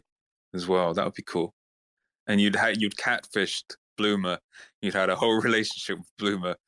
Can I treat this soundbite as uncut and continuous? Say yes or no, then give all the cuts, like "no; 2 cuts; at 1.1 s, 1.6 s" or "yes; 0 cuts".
yes; 0 cuts